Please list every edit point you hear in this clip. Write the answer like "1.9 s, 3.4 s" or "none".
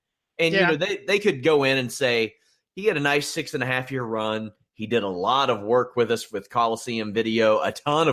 none